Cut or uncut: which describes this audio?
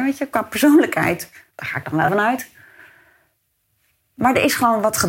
cut